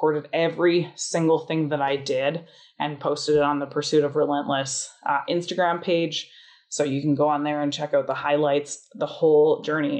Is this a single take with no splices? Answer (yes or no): yes